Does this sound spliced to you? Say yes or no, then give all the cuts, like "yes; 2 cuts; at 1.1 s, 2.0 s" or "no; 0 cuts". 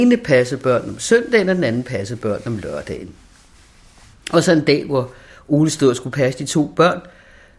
no; 0 cuts